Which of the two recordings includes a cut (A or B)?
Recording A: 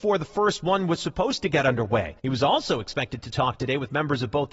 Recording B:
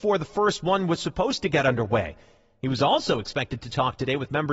A